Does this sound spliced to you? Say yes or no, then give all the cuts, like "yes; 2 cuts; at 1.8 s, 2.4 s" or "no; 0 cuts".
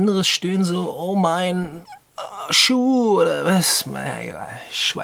no; 0 cuts